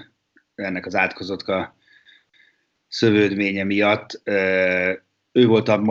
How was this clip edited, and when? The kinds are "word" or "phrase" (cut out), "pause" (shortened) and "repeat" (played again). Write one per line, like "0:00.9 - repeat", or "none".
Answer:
0:01.4 - word